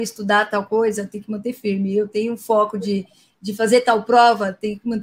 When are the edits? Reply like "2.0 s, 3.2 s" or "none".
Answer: none